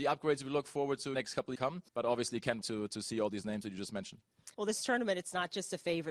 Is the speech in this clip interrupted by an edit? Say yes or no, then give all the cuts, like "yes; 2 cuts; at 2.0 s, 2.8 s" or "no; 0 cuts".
yes; 5 cuts; at 1.1 s, 1.5 s, 1.9 s, 2.6 s, 4.5 s